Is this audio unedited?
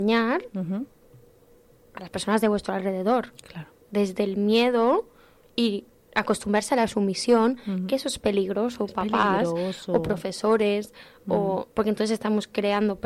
yes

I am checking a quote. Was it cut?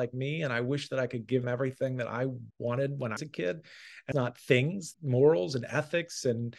yes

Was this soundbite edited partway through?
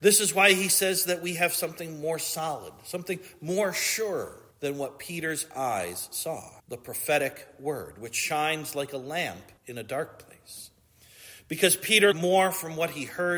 yes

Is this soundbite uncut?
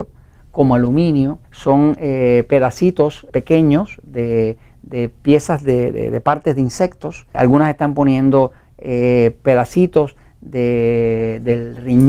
no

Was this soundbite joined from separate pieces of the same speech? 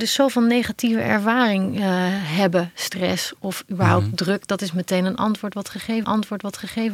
yes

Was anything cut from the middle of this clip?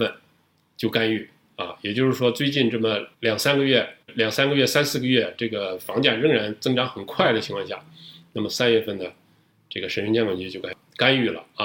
yes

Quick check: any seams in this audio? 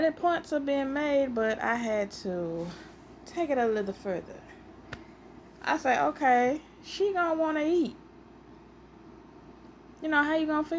no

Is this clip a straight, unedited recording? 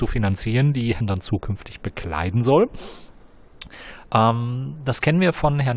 no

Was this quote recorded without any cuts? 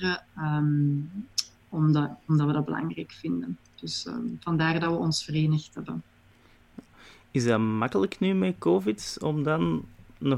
yes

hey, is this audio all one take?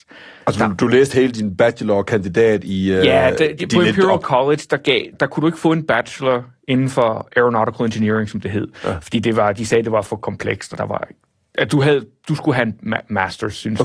no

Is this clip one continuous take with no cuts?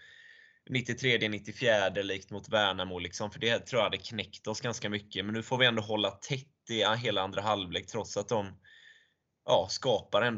yes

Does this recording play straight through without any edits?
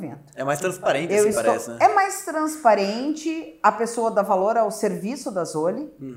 yes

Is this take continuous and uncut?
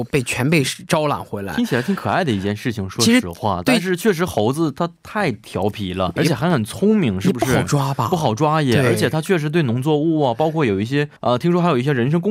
no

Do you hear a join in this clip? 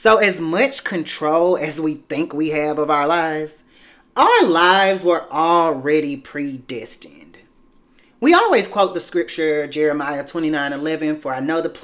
no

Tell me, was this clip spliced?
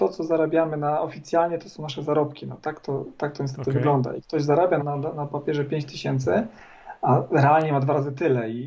yes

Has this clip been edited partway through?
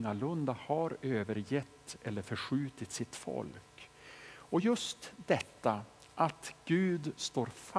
no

